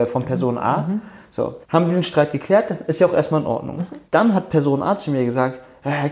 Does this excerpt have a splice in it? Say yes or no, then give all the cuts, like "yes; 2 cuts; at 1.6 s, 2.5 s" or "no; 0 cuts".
yes; 2 cuts; at 1.6 s, 4.1 s